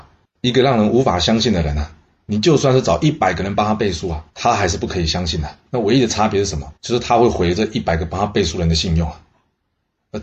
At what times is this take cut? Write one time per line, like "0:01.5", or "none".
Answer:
0:04.3
0:05.7
0:06.8